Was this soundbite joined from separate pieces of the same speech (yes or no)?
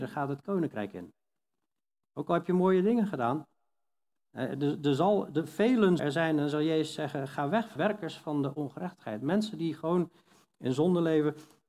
yes